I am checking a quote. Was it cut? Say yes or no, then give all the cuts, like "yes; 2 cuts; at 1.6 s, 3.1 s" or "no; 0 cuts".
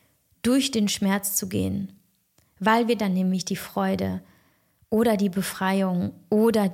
no; 0 cuts